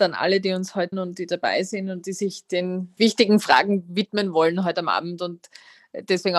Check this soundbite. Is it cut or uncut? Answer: cut